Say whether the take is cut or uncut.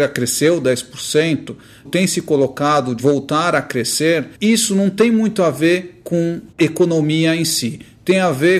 cut